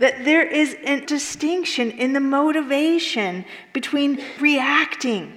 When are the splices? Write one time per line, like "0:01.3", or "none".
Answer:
0:01.1
0:04.4